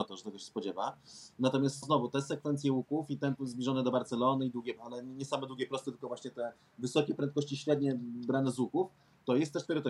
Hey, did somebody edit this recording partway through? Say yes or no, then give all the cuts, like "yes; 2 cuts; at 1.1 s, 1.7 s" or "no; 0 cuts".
yes; 3 cuts; at 1.8 s, 3.4 s, 4.8 s